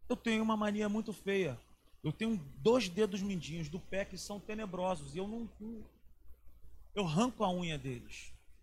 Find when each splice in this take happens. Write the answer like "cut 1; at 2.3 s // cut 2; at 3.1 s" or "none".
none